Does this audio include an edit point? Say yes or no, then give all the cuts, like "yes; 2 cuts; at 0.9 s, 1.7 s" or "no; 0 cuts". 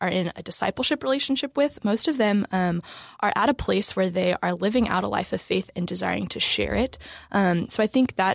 yes; 1 cut; at 3.2 s